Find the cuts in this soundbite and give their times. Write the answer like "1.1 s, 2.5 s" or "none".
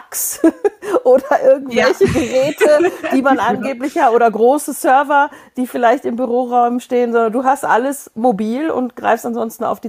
none